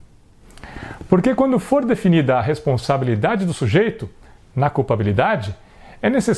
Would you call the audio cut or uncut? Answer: uncut